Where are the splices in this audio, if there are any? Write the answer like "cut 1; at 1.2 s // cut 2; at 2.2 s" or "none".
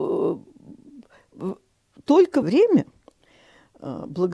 cut 1; at 2.4 s